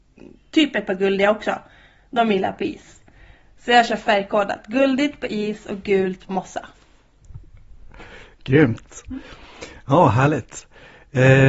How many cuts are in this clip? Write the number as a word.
one